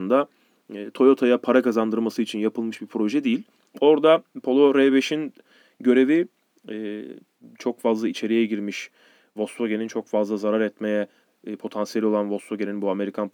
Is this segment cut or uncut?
uncut